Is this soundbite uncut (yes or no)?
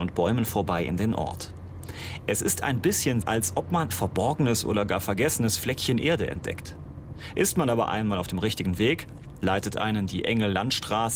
no